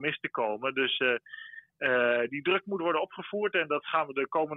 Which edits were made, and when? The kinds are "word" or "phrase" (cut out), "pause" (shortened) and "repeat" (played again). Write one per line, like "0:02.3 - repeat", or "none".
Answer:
none